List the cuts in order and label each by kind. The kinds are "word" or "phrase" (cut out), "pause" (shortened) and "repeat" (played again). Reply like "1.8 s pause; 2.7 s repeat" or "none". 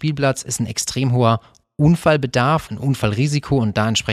2.7 s word